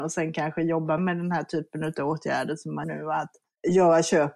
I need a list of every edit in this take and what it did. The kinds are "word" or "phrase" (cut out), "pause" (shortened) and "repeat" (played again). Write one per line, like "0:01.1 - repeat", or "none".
0:01.0 - word
0:02.8 - word